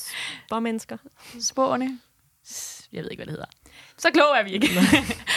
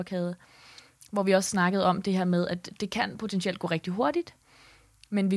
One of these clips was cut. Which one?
first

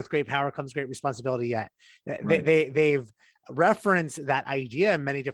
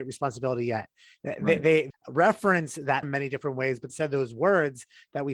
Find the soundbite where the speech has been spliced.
second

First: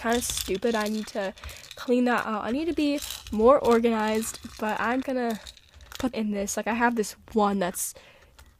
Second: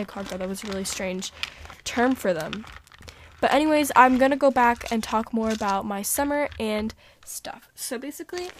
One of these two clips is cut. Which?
first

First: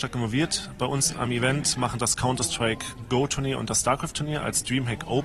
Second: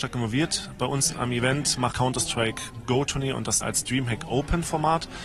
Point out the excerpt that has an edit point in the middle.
second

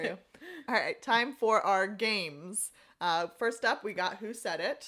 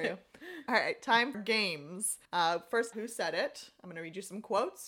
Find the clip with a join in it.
second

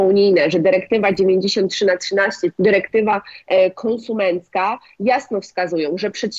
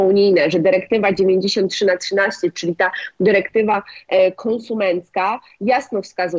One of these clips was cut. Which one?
first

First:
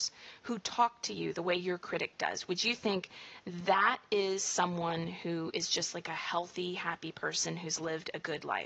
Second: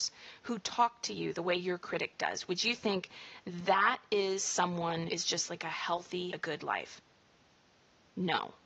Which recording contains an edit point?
second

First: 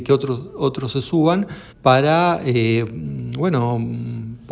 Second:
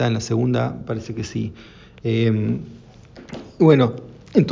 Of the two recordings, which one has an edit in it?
first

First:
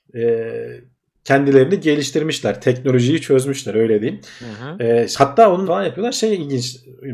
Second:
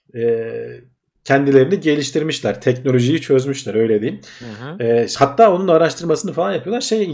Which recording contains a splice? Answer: first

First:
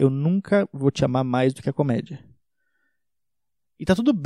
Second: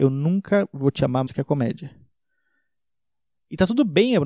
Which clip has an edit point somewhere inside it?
second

